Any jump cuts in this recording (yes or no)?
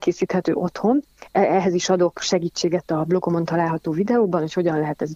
no